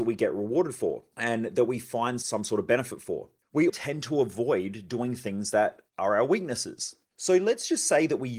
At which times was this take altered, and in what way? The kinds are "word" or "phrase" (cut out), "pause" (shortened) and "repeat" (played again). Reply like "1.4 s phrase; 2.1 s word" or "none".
3.7 s word